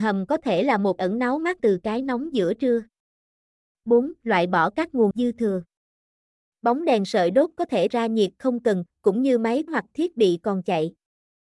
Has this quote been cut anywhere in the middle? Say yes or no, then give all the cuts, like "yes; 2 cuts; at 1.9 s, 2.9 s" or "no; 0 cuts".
yes; 6 cuts; at 1.0 s, 1.6 s, 5.1 s, 7.9 s, 8.9 s, 9.7 s